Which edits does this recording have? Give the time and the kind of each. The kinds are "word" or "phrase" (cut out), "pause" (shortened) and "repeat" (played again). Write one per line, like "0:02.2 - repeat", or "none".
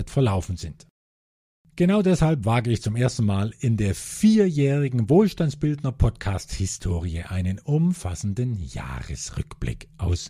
none